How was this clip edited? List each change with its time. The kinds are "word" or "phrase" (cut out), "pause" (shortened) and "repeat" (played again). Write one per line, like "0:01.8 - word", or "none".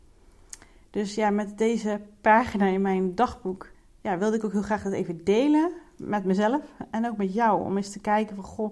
0:03.7 - pause